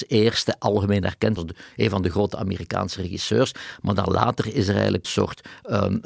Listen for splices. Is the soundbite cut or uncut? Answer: cut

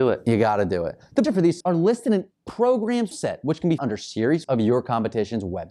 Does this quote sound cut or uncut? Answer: cut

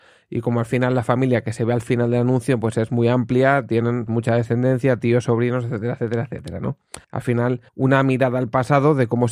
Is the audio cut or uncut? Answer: cut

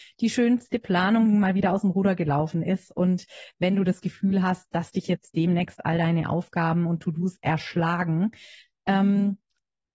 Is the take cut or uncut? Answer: uncut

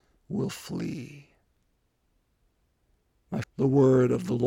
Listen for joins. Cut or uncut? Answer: cut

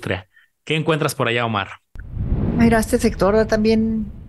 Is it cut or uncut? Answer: uncut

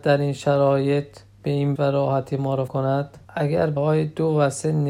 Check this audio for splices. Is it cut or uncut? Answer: cut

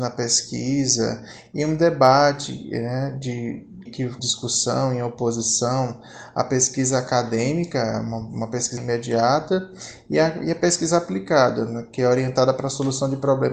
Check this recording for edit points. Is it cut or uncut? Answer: cut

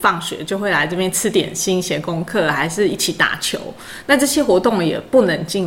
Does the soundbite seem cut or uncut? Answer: uncut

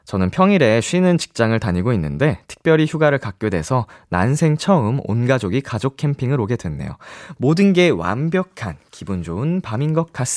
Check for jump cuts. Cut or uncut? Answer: uncut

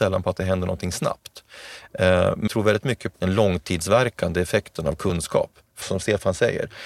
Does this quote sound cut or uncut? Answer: cut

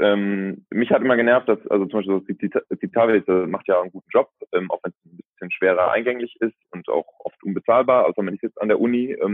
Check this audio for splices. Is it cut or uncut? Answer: uncut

